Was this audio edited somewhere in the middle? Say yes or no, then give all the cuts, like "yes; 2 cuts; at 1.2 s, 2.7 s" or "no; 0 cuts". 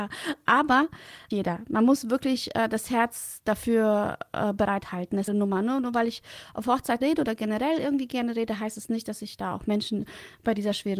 yes; 3 cuts; at 1.3 s, 5.3 s, 7.0 s